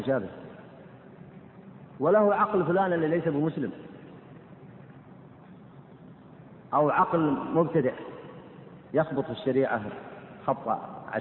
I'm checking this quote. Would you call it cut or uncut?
uncut